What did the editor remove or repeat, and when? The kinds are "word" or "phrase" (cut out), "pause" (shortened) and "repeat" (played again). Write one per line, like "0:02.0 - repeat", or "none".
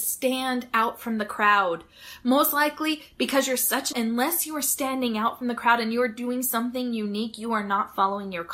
0:03.9 - word